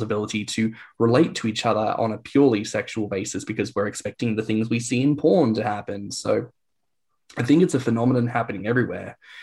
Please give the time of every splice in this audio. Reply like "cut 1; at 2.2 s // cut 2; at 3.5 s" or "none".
none